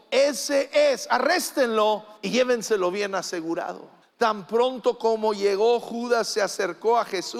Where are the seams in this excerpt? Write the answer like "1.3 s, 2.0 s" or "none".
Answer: 2.2 s, 4.0 s